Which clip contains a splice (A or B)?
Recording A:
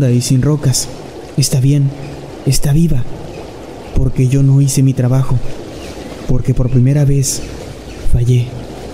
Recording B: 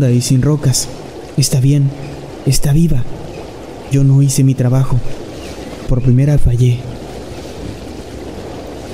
B